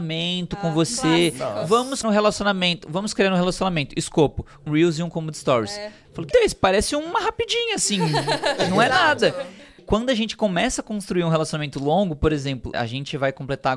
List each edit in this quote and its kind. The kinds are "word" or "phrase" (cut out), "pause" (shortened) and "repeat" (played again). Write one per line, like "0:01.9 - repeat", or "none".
0:02.0 - word
0:04.7 - word
0:06.3 - word
0:09.8 - word
0:12.7 - word

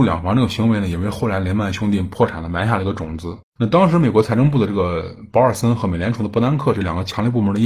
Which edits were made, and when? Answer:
0:03.4 - pause

